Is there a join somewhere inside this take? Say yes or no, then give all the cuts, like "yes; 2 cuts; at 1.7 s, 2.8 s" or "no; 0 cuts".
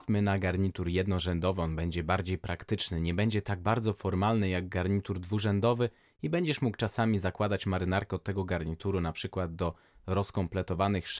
no; 0 cuts